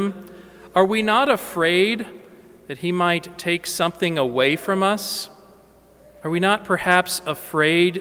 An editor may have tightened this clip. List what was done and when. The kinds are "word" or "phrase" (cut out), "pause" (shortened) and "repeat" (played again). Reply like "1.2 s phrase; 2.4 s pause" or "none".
none

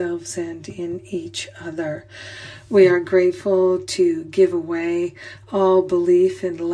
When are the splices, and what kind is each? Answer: none

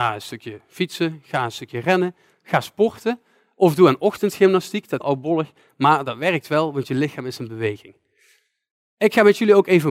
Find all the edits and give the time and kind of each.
5.0 s phrase

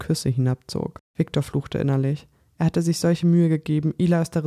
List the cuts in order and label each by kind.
none

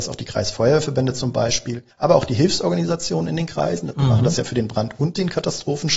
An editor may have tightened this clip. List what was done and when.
1.9 s pause

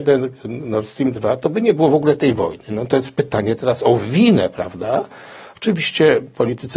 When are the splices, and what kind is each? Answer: none

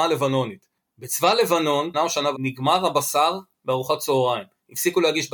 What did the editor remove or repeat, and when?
1.9 s phrase; 2.3 s word

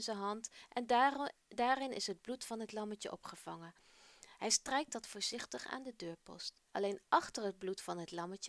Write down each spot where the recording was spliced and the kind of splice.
6.7 s pause

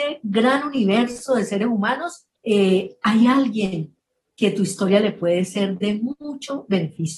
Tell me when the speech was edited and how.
2.3 s pause

